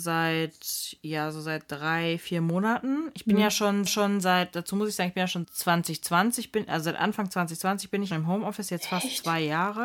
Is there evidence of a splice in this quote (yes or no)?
yes